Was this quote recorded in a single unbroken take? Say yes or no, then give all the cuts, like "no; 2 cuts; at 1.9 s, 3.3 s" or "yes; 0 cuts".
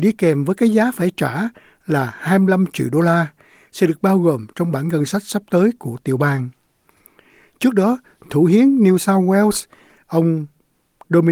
yes; 0 cuts